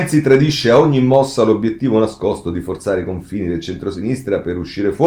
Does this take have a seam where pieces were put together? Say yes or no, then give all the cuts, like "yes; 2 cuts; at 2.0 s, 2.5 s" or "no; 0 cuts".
no; 0 cuts